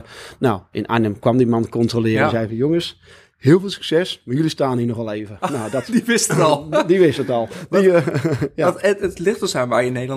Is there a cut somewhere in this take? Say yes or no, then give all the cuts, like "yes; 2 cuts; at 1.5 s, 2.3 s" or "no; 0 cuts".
yes; 1 cut; at 9.0 s